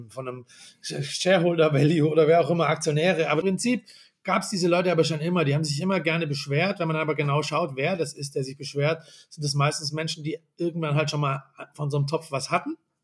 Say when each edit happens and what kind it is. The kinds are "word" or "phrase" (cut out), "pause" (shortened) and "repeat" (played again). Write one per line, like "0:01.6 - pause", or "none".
0:03.4 - phrase